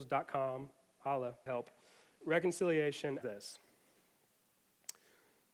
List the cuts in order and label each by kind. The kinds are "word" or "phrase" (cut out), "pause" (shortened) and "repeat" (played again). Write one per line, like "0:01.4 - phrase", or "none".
0:01.5 - word
0:02.2 - word
0:03.2 - word